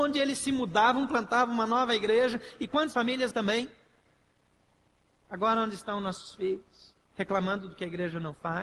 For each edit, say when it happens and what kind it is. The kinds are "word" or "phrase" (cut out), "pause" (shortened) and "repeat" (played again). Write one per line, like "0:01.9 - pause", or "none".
0:02.9 - phrase
0:03.3 - word
0:07.0 - pause